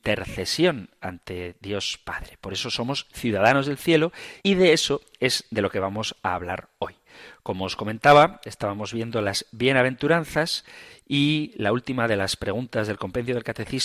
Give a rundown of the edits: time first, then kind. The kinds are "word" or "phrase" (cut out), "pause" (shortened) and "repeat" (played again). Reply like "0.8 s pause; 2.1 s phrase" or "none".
4.4 s pause